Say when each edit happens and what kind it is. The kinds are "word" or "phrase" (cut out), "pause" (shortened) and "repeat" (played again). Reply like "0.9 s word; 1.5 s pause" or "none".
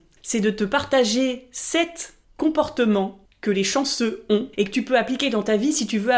3.3 s pause; 4.5 s pause